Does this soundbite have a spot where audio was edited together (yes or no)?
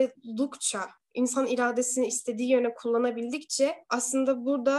yes